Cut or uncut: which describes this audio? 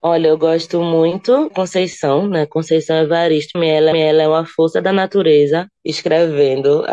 cut